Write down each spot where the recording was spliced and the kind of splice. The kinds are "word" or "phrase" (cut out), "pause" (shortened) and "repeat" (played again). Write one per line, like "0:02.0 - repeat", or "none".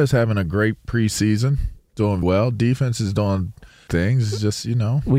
0:02.2 - word
0:03.9 - phrase